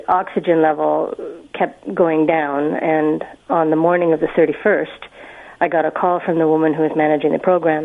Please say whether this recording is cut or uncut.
cut